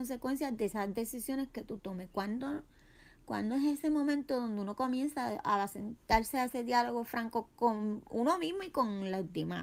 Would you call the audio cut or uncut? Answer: uncut